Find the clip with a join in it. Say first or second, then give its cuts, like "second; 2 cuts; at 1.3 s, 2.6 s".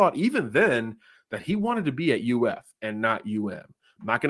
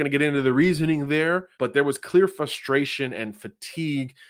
second; 1 cut; at 1.5 s